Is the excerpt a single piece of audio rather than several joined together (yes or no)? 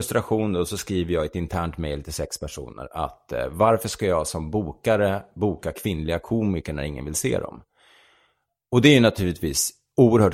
yes